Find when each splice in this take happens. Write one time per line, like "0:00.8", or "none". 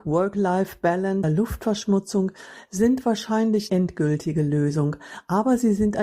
0:01.2
0:03.7